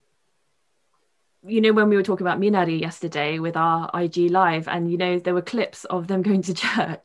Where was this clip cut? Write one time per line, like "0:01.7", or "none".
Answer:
none

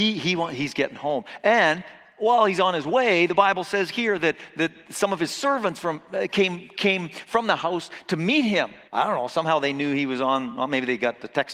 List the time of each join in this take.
0:08.9

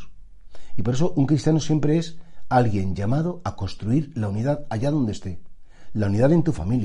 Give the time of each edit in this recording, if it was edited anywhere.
none

